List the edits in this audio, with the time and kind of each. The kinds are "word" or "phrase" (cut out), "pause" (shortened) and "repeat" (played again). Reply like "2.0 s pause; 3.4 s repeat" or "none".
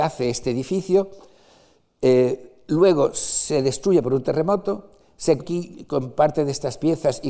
5.4 s word